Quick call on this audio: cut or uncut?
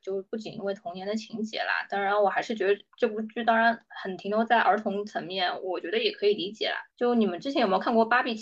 cut